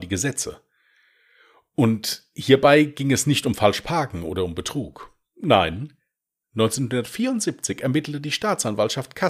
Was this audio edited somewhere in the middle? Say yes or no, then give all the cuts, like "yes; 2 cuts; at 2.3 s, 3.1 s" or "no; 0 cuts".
no; 0 cuts